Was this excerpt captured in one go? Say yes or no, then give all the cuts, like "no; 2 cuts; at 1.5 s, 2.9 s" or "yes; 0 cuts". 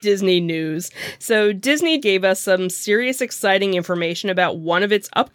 no; 1 cut; at 2.0 s